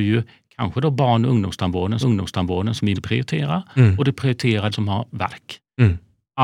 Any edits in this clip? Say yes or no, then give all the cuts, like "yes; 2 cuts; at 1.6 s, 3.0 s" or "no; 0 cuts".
yes; 3 cuts; at 2.0 s, 2.9 s, 4.7 s